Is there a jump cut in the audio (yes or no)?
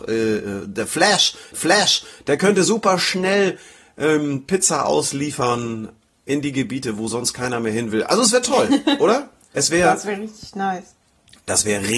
yes